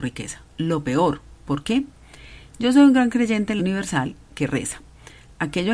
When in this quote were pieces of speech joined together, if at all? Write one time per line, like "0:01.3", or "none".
0:03.6

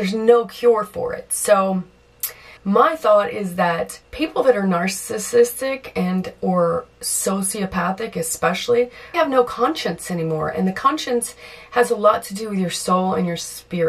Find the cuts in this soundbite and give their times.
0:02.6
0:04.0
0:09.1

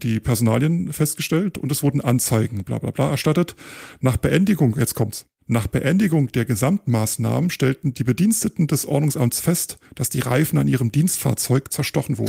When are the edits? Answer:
none

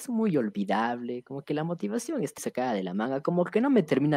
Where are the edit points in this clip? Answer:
0:02.4

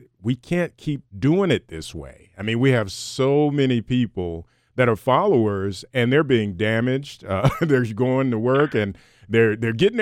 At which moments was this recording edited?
0:01.1

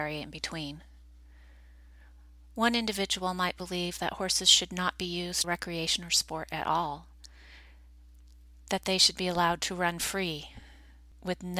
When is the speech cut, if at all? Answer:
0:05.4

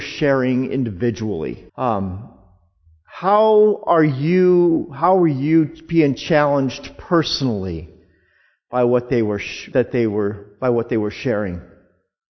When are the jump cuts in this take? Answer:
0:01.7
0:09.7

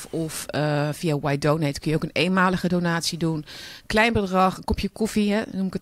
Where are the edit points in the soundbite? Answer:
none

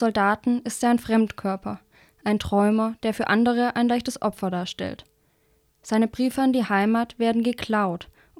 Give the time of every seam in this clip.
none

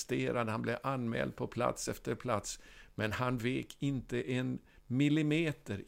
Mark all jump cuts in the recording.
none

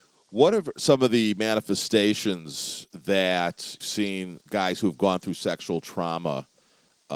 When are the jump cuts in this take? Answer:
0:03.8
0:04.5

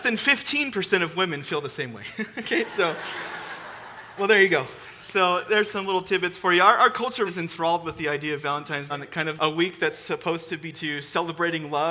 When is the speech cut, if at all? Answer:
0:04.2
0:07.3
0:08.9
0:09.4
0:10.7

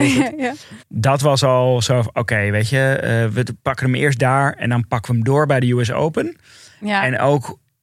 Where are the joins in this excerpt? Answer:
none

